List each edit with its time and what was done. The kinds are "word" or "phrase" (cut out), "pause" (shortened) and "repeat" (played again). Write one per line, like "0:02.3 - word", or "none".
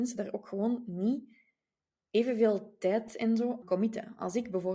0:03.6 - word